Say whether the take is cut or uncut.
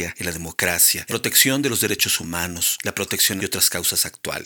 cut